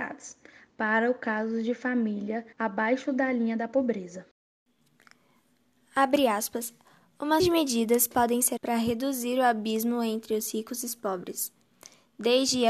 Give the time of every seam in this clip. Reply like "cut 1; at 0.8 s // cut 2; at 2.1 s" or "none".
cut 1; at 2.5 s // cut 2; at 7.4 s // cut 3; at 8.6 s